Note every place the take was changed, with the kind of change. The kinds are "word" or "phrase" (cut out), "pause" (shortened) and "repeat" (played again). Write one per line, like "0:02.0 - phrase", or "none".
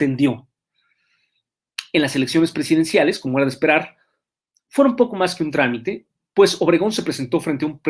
none